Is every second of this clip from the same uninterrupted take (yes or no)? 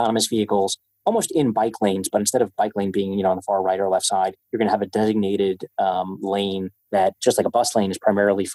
no